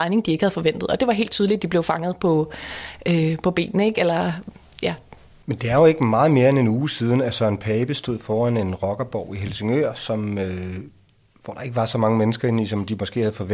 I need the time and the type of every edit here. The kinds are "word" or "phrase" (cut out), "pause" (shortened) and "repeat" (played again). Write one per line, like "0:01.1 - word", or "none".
none